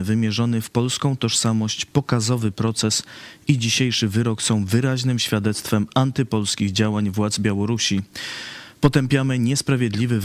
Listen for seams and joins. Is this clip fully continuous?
yes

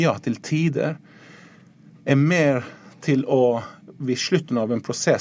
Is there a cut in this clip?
no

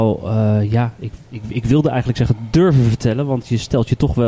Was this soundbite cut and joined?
no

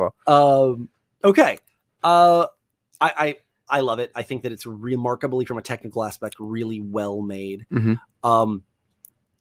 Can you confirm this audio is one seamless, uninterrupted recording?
yes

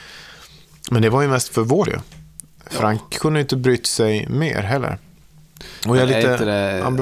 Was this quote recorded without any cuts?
no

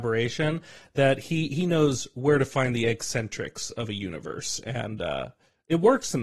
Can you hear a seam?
no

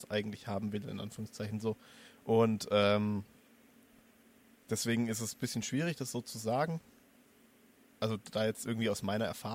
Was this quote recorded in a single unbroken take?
yes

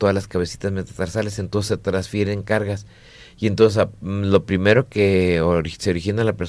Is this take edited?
no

